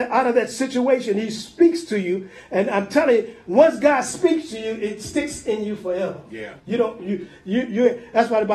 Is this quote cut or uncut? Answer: cut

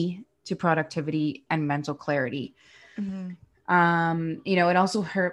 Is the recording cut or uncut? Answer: cut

